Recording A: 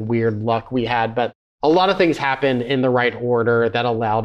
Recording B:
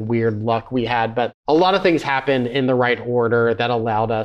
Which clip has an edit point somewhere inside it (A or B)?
B